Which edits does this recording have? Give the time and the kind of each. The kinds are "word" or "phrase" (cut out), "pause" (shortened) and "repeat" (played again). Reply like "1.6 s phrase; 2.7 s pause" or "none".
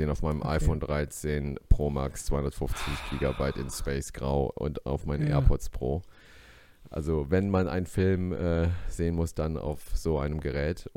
4.6 s word